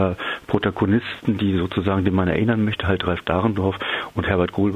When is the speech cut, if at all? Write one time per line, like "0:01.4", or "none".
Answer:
none